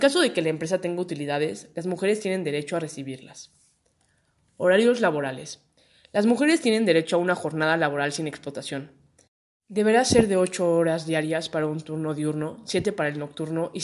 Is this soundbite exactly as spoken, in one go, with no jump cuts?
yes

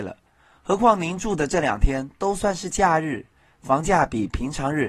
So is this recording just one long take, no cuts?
yes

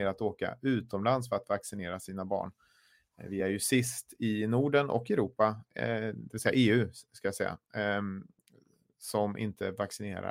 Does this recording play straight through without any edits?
yes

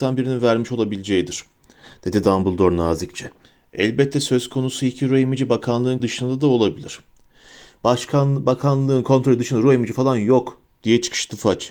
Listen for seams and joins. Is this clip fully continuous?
no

